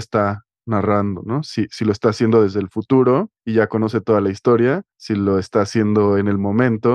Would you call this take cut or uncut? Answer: cut